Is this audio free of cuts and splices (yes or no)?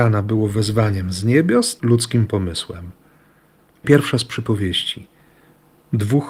no